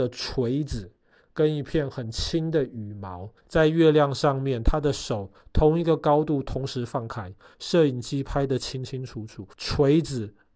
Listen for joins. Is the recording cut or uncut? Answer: cut